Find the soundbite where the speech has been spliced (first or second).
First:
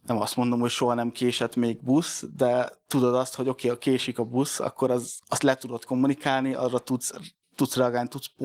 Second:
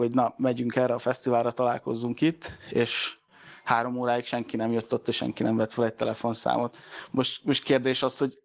first